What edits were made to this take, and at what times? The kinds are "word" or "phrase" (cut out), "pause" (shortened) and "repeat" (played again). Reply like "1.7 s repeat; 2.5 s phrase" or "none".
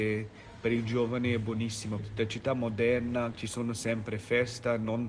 2.0 s word; 3.3 s word